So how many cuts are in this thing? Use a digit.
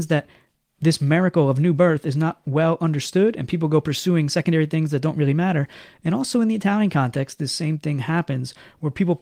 0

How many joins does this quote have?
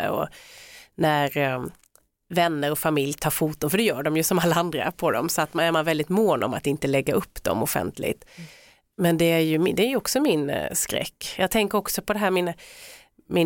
0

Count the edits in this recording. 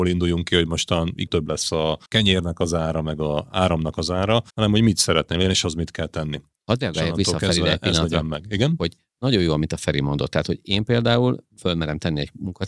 4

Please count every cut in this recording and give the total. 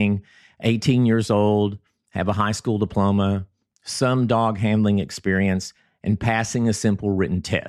0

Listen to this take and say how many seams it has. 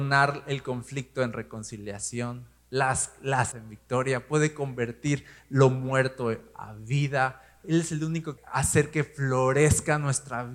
3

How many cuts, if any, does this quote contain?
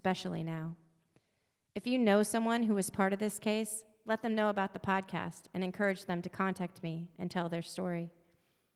0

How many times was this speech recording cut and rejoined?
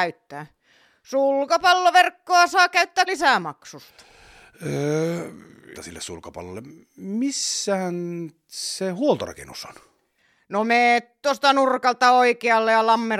2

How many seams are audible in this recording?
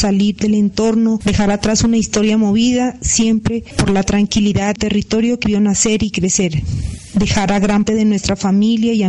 3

